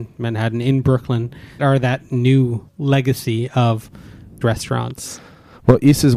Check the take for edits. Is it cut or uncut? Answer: cut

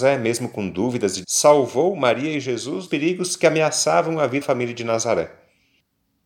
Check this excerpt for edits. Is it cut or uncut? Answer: cut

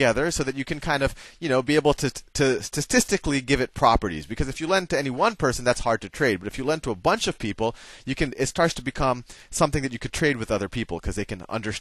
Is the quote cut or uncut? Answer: cut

